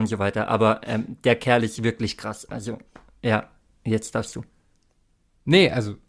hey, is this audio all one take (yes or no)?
yes